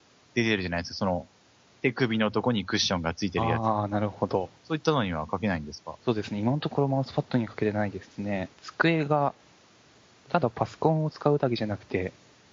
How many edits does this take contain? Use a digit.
3